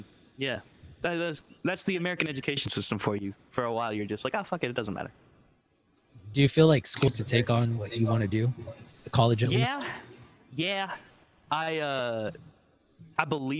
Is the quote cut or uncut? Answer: cut